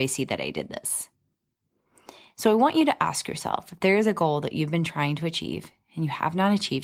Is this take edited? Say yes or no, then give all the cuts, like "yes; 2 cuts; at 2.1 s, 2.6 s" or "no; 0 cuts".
no; 0 cuts